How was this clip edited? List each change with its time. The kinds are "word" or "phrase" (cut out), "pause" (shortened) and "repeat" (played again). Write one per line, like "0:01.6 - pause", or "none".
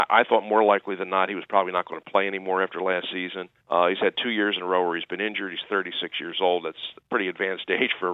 0:03.6 - pause